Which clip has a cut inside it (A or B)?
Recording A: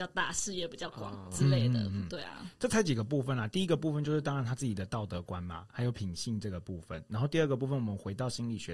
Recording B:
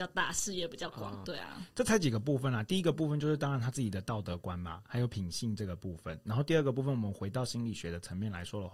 B